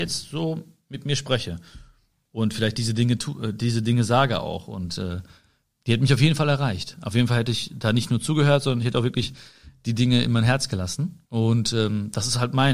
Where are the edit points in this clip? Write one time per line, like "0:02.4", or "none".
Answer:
0:11.3